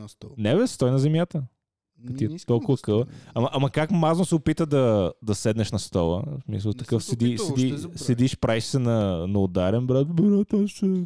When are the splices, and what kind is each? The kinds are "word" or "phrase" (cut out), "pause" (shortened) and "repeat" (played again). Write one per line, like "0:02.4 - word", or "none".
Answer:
none